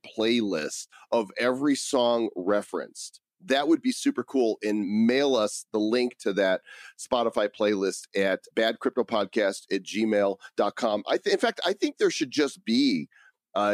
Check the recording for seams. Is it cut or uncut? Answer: cut